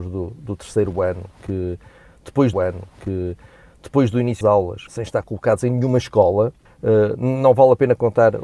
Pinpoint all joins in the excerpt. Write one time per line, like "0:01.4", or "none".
0:02.5
0:04.4
0:04.9
0:06.7